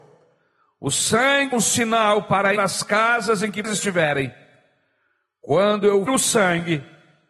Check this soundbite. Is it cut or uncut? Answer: cut